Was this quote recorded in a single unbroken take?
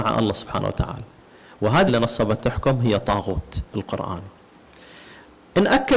no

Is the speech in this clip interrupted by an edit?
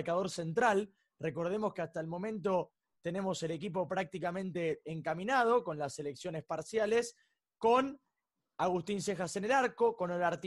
no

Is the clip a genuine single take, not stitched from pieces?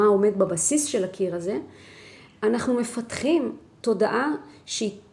yes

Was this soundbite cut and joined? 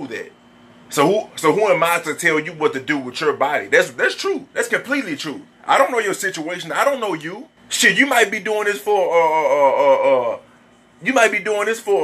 yes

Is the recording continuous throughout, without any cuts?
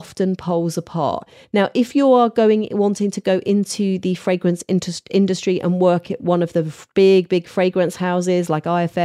yes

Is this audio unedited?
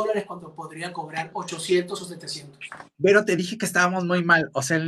yes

